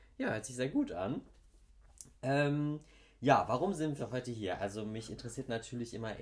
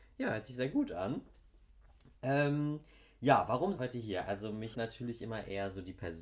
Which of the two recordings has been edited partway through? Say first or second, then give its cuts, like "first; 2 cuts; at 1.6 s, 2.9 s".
second; 2 cuts; at 3.8 s, 4.7 s